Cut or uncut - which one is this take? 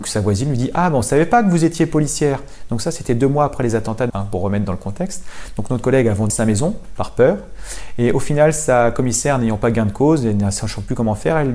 cut